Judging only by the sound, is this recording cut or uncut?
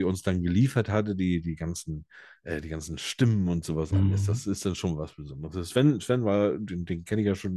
uncut